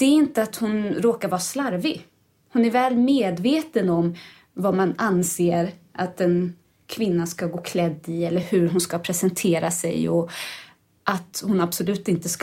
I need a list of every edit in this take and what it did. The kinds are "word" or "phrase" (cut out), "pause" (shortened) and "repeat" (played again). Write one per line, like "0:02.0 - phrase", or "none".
none